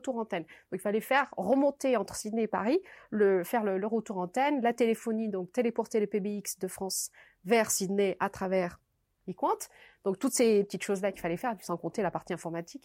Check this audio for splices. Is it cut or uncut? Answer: uncut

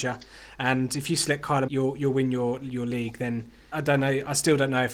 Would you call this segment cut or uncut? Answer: cut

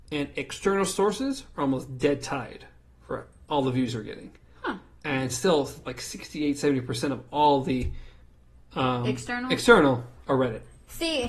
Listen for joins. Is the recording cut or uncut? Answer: uncut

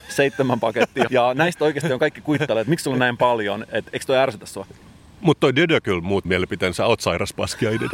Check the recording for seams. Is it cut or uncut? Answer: cut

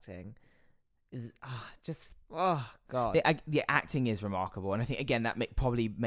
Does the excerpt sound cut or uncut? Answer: cut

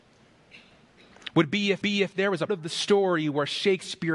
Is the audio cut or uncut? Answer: cut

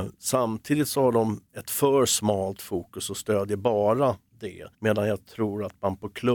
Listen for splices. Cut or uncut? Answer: cut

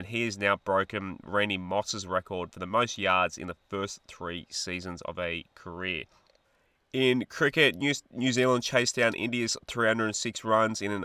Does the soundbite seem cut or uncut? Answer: uncut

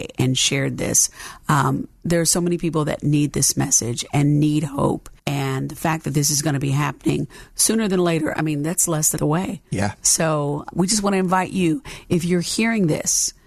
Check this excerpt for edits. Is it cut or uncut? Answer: cut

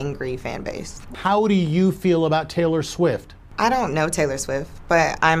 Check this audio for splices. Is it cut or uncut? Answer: uncut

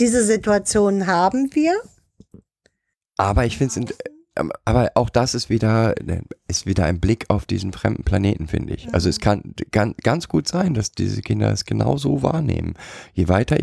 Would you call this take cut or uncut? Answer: uncut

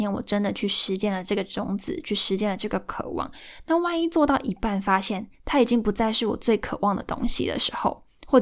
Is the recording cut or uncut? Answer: cut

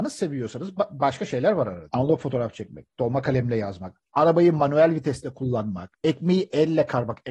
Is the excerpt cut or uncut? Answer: uncut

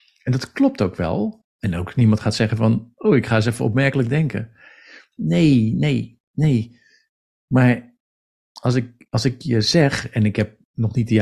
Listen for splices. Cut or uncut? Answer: uncut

